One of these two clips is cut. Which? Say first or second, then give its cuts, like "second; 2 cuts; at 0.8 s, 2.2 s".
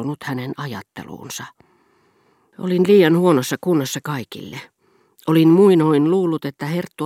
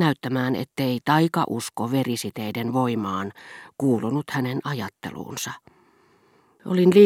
first; 1 cut; at 4.0 s